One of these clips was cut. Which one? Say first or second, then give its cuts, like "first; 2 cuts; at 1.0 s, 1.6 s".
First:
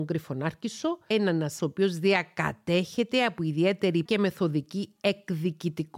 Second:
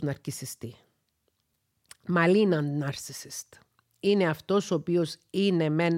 first; 3 cuts; at 1.1 s, 1.6 s, 4.1 s